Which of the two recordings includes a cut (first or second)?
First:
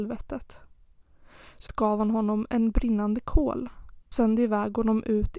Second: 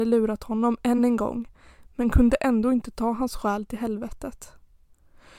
first